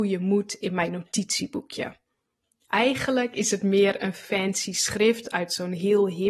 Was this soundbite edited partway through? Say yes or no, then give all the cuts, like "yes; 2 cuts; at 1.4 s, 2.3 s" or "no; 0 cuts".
no; 0 cuts